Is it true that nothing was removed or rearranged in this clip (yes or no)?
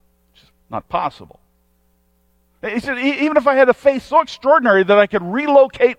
yes